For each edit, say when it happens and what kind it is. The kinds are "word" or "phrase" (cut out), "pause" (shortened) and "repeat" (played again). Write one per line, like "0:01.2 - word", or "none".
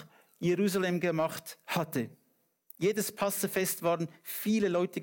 none